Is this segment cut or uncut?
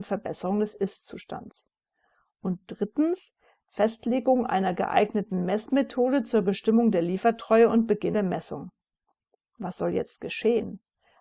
uncut